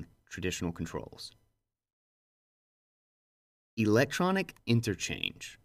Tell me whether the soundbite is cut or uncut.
cut